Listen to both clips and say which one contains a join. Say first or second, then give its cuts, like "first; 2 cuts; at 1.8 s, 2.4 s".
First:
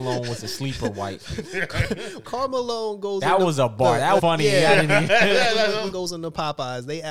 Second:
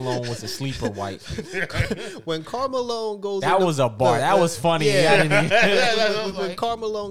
first; 3 cuts; at 2.2 s, 4.2 s, 5.9 s